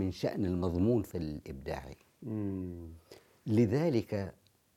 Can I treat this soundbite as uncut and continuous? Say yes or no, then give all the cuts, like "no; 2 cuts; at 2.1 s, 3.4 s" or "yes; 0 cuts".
no; 1 cut; at 1.1 s